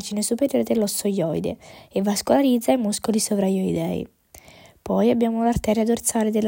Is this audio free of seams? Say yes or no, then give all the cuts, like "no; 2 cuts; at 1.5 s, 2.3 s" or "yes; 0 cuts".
yes; 0 cuts